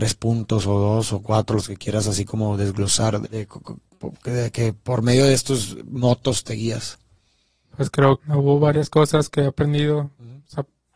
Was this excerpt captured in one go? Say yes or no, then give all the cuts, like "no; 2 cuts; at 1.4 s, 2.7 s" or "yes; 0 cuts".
no; 2 cuts; at 3.2 s, 8.2 s